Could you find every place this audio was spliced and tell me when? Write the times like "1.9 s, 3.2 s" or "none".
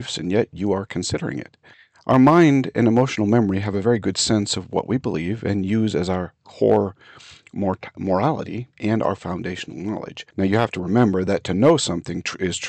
1.7 s, 8.7 s, 10.3 s